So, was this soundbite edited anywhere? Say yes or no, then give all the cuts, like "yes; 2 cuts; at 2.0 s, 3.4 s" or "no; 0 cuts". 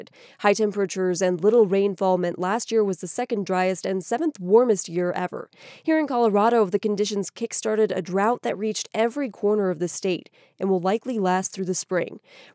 no; 0 cuts